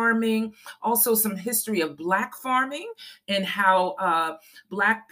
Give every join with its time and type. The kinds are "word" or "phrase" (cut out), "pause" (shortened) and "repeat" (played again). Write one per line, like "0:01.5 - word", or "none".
none